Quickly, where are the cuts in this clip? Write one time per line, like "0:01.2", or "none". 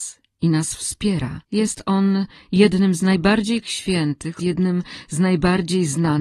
0:01.4
0:03.6
0:04.4